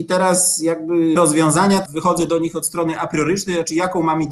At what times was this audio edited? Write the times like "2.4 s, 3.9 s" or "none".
1.2 s, 1.9 s